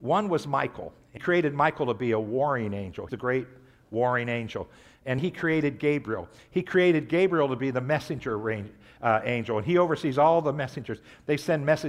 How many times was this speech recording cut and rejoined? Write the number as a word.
three